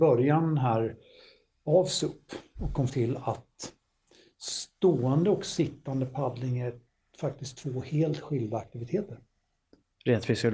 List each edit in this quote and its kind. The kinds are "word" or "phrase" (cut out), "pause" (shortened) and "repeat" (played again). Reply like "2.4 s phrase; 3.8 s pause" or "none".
2.9 s word